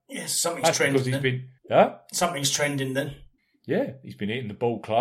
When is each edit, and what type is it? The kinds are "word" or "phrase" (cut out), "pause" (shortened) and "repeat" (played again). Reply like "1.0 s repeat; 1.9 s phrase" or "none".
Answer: 1.6 s pause; 3.4 s pause